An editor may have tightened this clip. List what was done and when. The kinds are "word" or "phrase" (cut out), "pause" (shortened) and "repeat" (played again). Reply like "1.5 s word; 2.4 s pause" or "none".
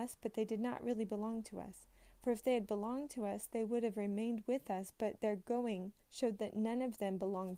6.0 s pause

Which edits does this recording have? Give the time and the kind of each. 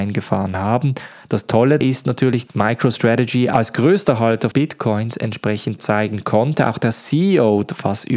1.8 s word; 2.5 s word; 4.5 s word; 5.8 s phrase

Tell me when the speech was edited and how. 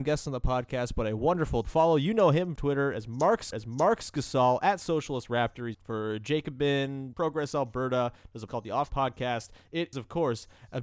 1.6 s word; 2.6 s word; 3.5 s repeat; 5.7 s phrase; 7.1 s phrase; 8.5 s word; 8.9 s word; 9.9 s word

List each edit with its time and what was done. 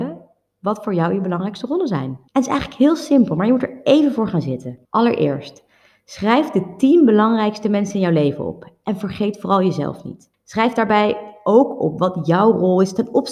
2.3 s pause; 4.8 s pause; 10.3 s pause

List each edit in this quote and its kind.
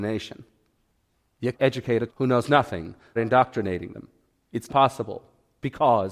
1.5 s word; 2.1 s word; 3.2 s word; 4.7 s word

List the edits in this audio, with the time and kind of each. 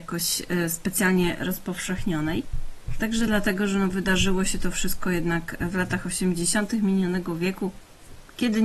none

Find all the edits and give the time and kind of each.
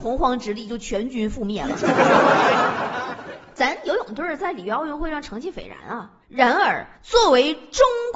6.2 s pause; 6.9 s pause

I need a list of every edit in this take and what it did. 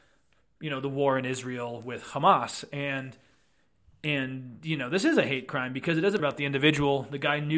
6.2 s word

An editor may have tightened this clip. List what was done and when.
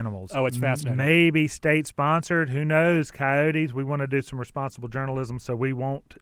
none

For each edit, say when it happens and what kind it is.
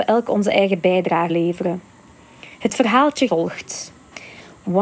1.3 s word; 2.5 s pause; 3.3 s phrase

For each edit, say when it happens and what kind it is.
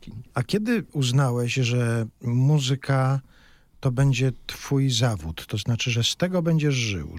none

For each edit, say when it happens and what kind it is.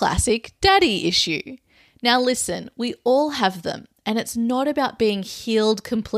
none

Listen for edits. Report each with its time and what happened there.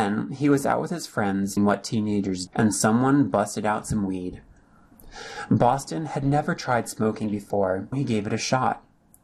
1.6 s word; 2.5 s word; 7.9 s word

